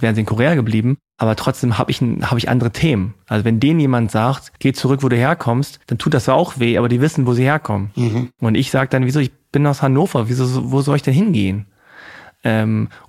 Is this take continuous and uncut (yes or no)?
no